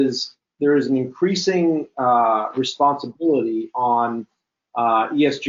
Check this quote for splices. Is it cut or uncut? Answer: uncut